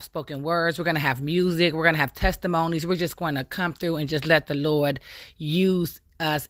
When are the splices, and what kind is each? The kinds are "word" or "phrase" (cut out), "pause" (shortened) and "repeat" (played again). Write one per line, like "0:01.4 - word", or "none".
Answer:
none